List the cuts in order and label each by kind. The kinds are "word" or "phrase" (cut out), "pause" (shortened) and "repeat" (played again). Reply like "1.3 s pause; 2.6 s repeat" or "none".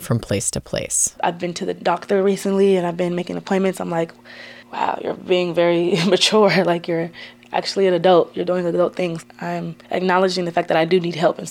4.6 s pause; 9.8 s pause